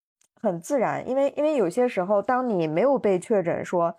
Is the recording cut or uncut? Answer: uncut